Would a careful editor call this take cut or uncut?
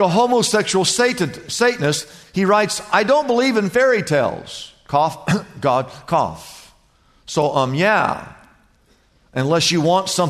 uncut